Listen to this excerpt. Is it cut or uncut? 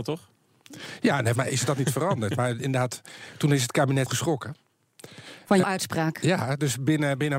cut